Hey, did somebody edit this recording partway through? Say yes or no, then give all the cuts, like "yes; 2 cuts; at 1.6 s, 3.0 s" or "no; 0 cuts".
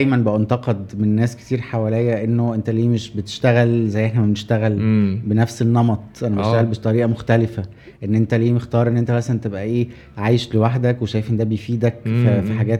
no; 0 cuts